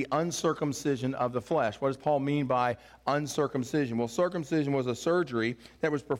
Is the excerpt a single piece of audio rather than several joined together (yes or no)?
yes